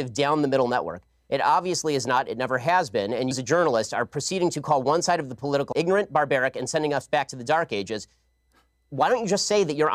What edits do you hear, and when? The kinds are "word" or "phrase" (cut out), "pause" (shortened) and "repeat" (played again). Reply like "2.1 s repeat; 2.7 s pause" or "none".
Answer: 3.3 s word; 5.7 s word